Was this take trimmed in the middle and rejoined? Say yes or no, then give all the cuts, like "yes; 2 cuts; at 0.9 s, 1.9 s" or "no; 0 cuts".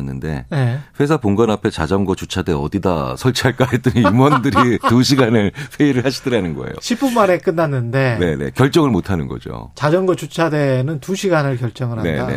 no; 0 cuts